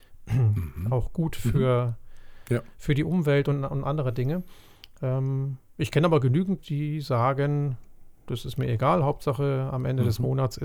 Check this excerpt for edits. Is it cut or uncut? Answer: cut